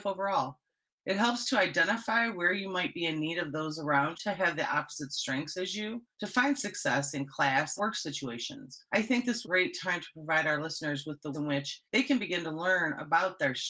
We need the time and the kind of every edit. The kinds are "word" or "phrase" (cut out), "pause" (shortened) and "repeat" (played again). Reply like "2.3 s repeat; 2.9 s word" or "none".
4.1 s word; 6.1 s pause; 7.8 s word; 8.9 s pause; 9.4 s phrase; 11.3 s word; 11.8 s pause